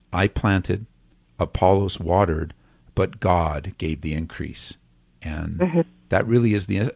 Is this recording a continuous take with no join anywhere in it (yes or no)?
yes